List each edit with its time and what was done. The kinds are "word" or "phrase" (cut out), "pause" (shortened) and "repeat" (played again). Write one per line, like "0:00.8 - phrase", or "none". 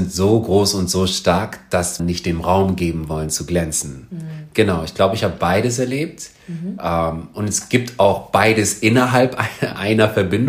0:02.0 - phrase